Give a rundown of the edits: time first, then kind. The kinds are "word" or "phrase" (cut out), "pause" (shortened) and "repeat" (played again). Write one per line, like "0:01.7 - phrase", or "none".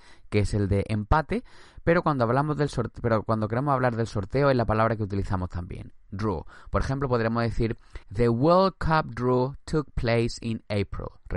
0:08.0 - pause